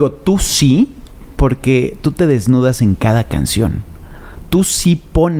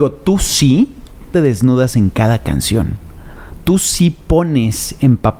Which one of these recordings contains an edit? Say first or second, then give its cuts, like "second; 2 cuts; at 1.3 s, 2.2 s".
second; 1 cut; at 1.3 s